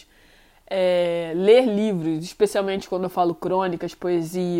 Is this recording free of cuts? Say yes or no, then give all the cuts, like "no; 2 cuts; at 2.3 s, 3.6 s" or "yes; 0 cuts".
yes; 0 cuts